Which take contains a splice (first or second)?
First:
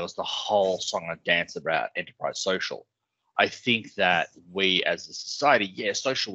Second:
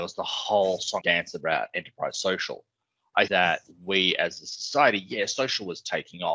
second